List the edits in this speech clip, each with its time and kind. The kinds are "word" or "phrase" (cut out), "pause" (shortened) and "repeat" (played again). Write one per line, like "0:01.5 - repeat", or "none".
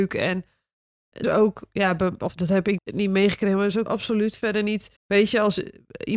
0:01.2 - phrase
0:02.4 - word
0:02.8 - word
0:03.9 - word
0:05.0 - pause